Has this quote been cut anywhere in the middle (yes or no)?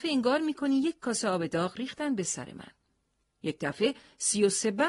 no